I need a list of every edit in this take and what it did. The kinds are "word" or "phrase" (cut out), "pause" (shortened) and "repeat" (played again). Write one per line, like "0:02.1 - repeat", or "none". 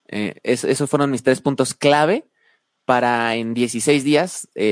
none